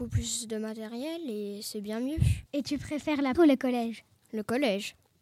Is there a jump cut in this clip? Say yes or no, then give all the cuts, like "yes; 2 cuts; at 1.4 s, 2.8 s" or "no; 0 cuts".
yes; 2 cuts; at 2.5 s, 3.3 s